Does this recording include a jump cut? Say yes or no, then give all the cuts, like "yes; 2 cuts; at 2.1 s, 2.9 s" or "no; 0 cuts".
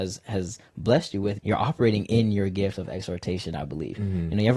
yes; 1 cut; at 1.4 s